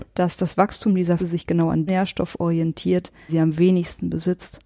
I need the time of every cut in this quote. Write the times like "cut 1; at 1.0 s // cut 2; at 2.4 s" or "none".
cut 1; at 1.2 s // cut 2; at 1.9 s // cut 3; at 3.3 s